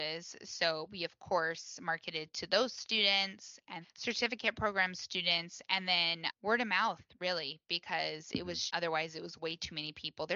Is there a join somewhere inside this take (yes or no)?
yes